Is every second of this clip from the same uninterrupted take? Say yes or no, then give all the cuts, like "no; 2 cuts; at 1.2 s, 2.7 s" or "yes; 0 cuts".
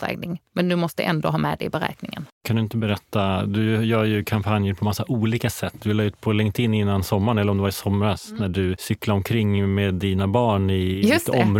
no; 1 cut; at 2.3 s